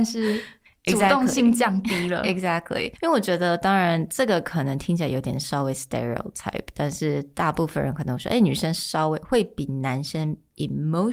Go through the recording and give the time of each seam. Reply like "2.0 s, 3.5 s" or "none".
none